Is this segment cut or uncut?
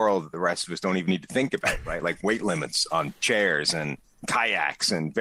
uncut